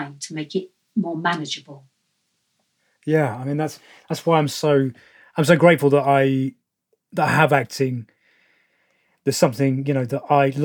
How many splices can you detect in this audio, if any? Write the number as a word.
zero